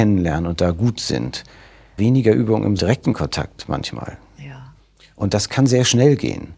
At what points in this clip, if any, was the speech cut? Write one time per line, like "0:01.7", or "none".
0:02.0
0:02.8